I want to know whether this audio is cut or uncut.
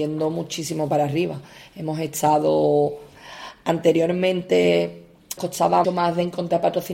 cut